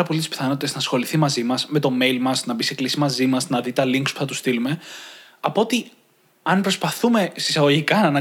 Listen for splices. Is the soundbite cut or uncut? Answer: uncut